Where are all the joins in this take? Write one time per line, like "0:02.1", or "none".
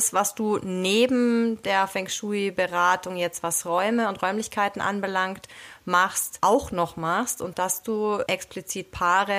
0:07.5